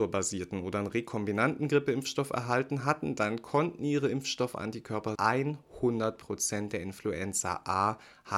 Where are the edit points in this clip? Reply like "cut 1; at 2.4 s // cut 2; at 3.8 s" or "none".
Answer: cut 1; at 5.2 s

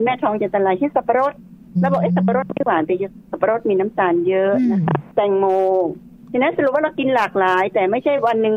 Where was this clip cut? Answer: cut 1; at 5.1 s

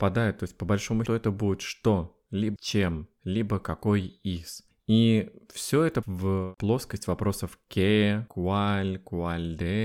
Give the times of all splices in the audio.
cut 1; at 1.1 s // cut 2; at 2.6 s // cut 3; at 6.0 s // cut 4; at 8.3 s

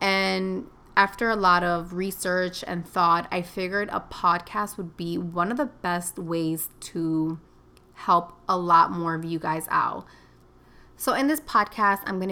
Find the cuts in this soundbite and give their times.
none

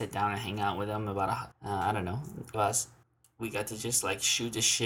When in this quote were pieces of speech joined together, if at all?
cut 1; at 1.5 s // cut 2; at 2.5 s // cut 3; at 3.0 s

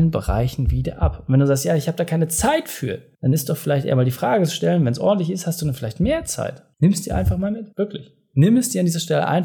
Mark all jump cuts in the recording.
cut 1; at 7.7 s

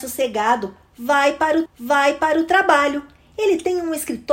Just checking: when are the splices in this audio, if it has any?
cut 1; at 1.7 s

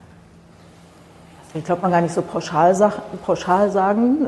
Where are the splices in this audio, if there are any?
cut 1; at 1.8 s

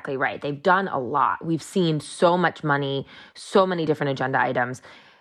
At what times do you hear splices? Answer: none

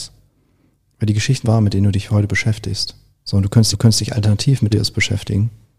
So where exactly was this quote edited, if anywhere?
cut 1; at 1.4 s // cut 2; at 3.1 s // cut 3; at 3.7 s // cut 4; at 4.7 s

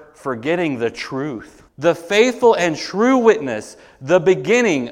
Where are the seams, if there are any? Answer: cut 1; at 1.7 s

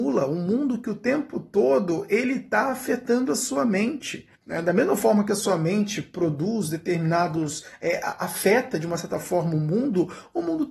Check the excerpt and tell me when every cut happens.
cut 1; at 4.3 s

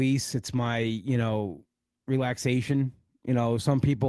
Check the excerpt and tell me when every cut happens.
none

